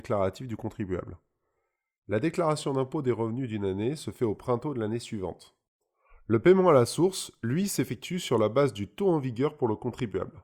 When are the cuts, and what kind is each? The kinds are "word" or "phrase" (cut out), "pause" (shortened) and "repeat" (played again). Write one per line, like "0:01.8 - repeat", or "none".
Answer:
none